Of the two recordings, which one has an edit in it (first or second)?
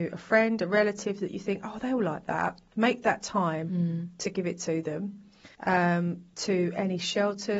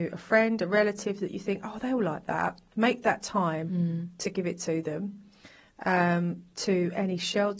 first